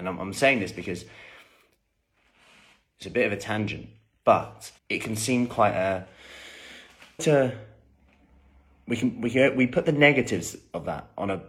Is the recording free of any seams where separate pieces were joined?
no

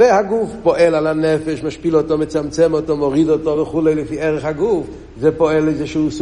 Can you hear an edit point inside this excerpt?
no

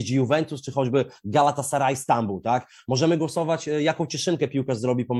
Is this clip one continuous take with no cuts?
yes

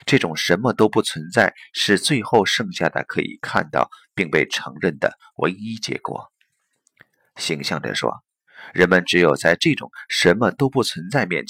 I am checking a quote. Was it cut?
no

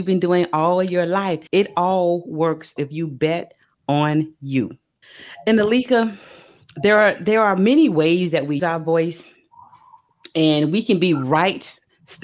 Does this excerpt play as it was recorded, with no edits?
no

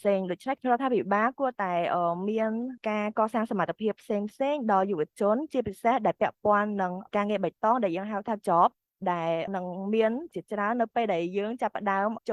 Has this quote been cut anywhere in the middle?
yes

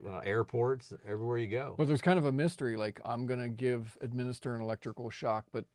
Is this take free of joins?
yes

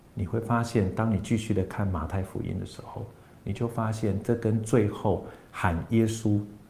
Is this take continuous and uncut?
yes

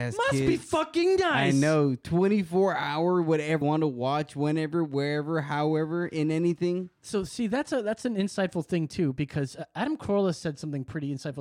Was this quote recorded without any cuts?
no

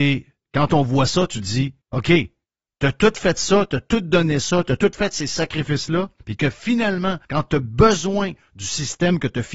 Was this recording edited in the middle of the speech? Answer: yes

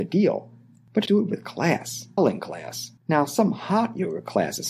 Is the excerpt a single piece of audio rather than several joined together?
no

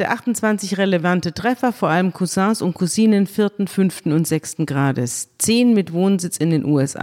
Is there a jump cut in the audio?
no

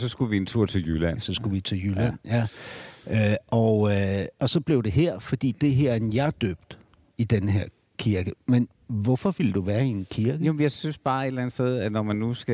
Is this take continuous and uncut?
yes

